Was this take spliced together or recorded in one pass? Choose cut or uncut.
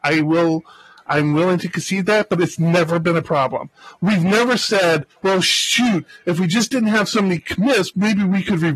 cut